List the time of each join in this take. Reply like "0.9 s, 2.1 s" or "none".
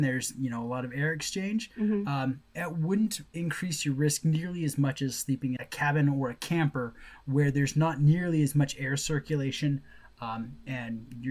3.3 s, 5.6 s